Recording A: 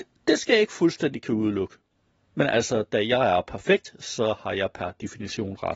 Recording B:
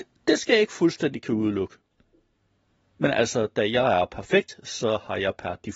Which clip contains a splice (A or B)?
A